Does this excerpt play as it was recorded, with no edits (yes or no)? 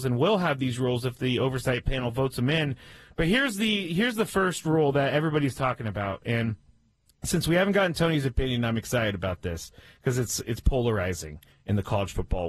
yes